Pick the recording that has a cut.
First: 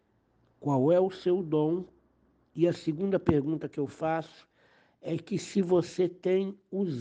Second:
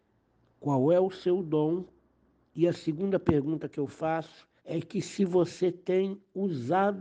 second; 1 cut; at 4.6 s

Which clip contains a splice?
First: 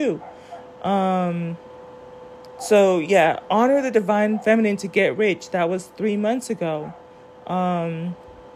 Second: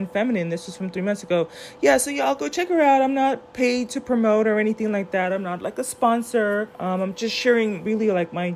second; 1 cut; at 6.7 s

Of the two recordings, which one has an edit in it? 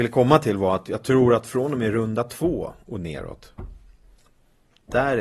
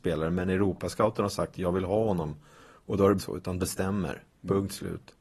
second; 2 cuts; at 3.2 s, 3.6 s

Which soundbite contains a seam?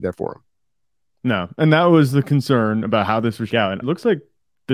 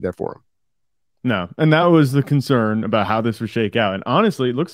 first; 2 cuts; at 3.5 s, 3.8 s

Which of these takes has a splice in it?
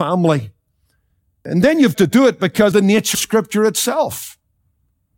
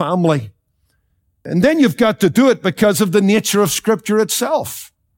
first; 3 cuts; at 1.9 s, 2.7 s, 3.1 s

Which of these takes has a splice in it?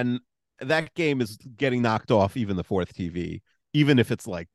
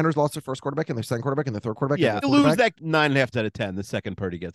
second; 3 cuts; at 2.2 s, 2.7 s, 3.3 s

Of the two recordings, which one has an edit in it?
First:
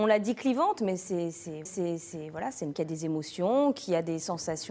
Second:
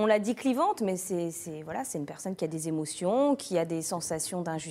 first; 2 cuts; at 1.7 s, 2.7 s

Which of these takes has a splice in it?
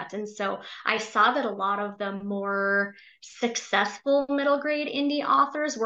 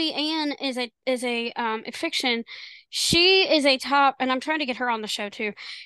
second; 1 cut; at 1.9 s

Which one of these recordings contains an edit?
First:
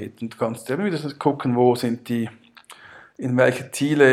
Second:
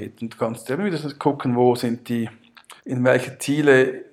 second; 1 cut; at 2.8 s

